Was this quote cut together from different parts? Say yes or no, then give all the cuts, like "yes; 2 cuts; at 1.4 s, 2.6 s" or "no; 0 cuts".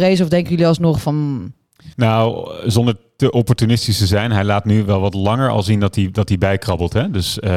yes; 1 cut; at 1.9 s